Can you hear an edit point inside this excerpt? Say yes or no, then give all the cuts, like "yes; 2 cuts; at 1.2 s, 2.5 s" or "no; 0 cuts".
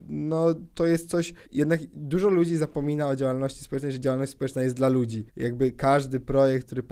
yes; 2 cuts; at 1.5 s, 5.3 s